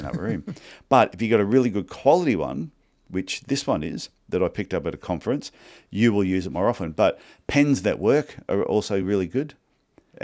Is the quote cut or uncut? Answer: uncut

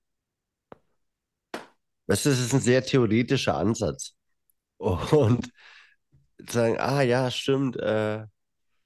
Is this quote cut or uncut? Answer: uncut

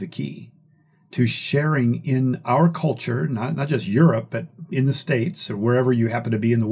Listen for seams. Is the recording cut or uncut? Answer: uncut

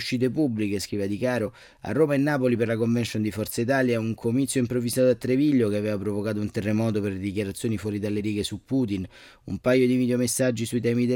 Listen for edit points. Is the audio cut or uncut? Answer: uncut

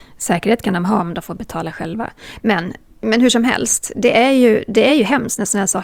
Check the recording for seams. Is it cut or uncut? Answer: uncut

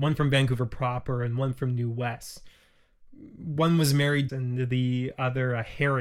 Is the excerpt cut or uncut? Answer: cut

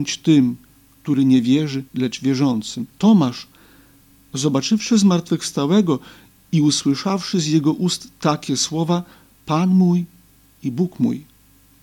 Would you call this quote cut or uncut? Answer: cut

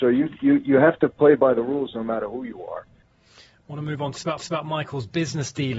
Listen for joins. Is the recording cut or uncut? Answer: cut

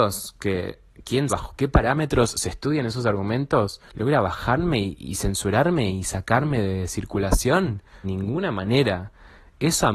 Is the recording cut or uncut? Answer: cut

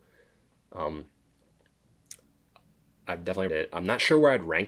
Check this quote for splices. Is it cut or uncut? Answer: cut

